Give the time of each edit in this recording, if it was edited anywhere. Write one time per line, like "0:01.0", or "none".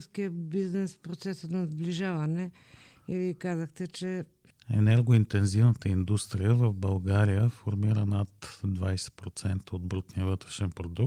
none